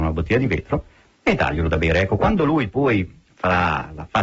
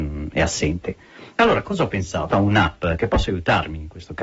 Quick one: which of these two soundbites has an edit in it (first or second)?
second